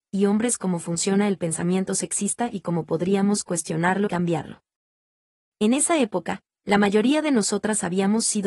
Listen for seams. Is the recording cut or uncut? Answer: cut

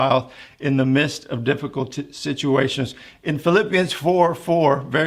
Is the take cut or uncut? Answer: uncut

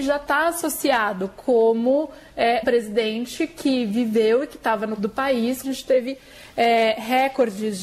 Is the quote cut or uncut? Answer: cut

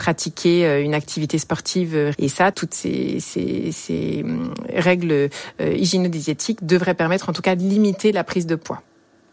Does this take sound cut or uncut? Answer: cut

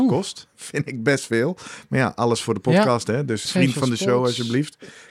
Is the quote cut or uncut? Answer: cut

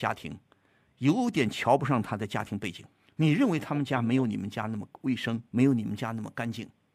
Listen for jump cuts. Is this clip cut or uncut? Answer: cut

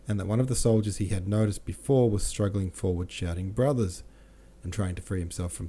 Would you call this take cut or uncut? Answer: uncut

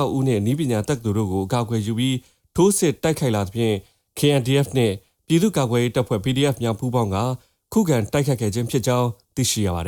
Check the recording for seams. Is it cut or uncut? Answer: uncut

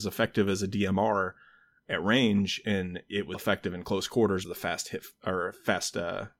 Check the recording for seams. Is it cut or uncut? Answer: cut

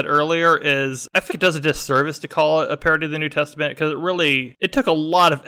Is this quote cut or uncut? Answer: cut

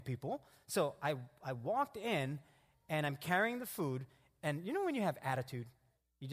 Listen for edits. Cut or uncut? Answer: uncut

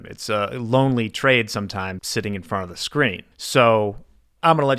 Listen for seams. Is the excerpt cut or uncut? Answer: cut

